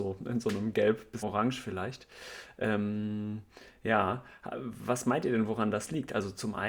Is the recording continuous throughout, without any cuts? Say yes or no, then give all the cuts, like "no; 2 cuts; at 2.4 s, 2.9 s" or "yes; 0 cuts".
no; 1 cut; at 1.2 s